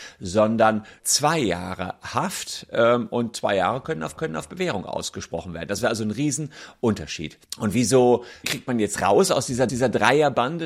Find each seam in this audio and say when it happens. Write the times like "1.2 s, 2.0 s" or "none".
1.0 s, 4.2 s, 7.5 s, 8.4 s, 9.7 s